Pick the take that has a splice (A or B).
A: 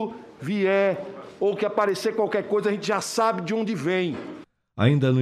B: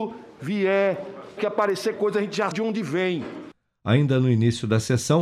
B